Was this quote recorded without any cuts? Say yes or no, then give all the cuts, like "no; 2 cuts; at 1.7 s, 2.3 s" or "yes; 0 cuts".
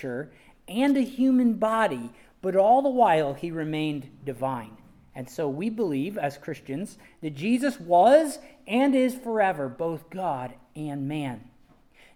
yes; 0 cuts